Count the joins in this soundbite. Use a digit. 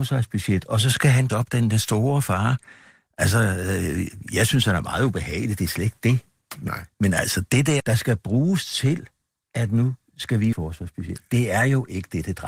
4